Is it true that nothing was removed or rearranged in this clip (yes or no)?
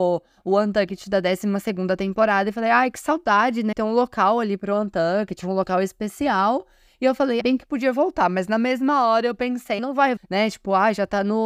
no